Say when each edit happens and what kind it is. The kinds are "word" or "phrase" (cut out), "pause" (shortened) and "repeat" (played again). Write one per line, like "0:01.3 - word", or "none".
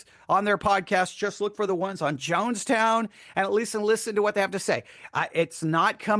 none